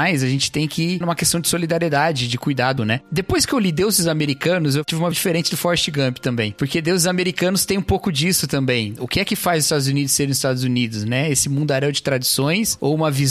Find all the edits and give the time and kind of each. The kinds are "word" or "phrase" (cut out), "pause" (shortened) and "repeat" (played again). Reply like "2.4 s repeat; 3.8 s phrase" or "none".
1.0 s word; 2.8 s word; 5.1 s word